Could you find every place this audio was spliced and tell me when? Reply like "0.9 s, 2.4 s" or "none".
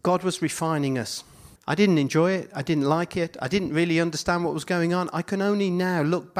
1.6 s